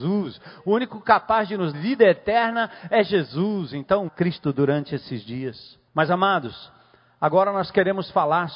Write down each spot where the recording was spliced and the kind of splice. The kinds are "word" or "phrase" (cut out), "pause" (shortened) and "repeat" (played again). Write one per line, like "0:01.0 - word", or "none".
0:01.7 - word
0:04.1 - phrase
0:05.9 - pause